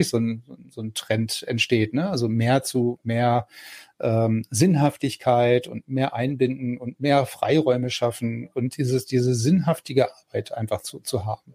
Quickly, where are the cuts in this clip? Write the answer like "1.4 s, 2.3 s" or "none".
none